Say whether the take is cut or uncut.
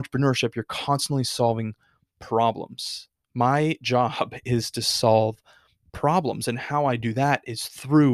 uncut